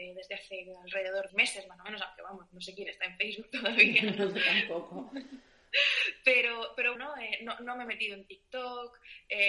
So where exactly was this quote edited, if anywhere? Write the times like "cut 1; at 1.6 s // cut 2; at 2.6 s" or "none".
cut 1; at 1.3 s // cut 2; at 7.0 s